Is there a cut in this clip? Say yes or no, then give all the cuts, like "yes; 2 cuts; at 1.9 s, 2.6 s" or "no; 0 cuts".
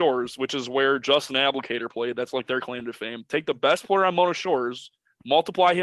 no; 0 cuts